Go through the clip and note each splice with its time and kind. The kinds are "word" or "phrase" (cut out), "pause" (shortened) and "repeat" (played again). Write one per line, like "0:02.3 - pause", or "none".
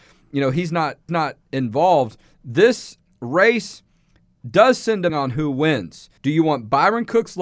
0:01.1 - repeat
0:05.1 - phrase
0:06.2 - pause